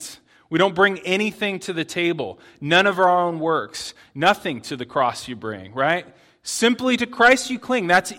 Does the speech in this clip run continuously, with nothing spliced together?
yes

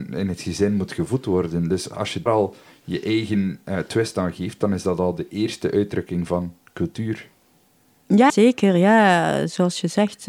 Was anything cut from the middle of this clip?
yes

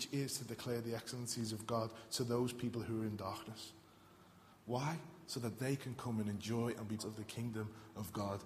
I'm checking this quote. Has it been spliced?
yes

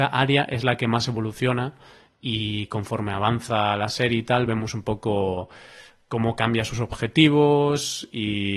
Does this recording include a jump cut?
no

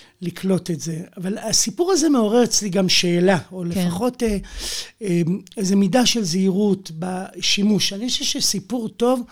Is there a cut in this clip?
no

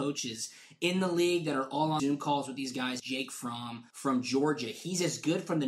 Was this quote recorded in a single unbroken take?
no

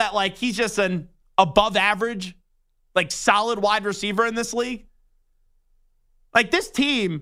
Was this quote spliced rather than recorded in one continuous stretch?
no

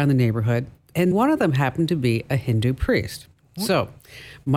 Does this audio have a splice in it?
yes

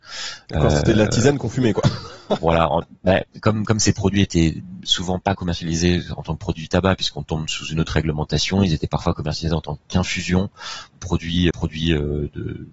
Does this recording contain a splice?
yes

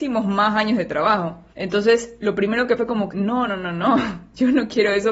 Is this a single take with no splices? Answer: no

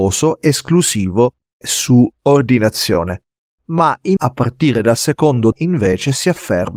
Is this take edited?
yes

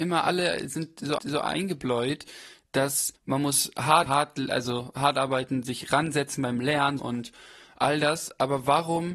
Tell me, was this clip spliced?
yes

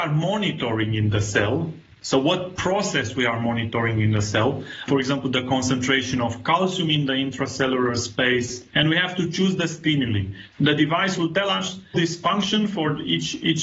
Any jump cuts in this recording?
yes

